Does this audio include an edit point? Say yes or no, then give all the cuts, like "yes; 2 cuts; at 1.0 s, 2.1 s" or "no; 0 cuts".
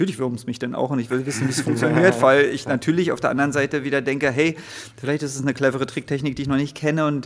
no; 0 cuts